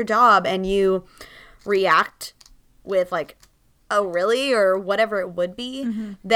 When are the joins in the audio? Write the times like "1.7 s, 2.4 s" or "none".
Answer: none